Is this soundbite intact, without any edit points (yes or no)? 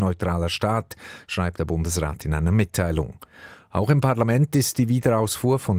yes